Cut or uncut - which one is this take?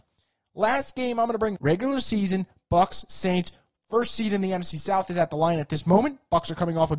cut